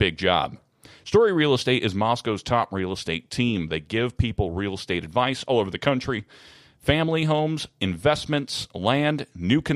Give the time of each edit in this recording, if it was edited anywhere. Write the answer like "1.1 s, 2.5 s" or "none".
none